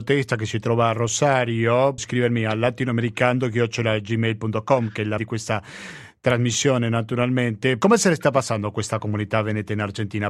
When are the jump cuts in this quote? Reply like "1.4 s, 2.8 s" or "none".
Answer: 2.0 s, 5.2 s